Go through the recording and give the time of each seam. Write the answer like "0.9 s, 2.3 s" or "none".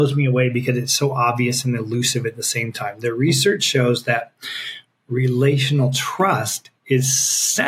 none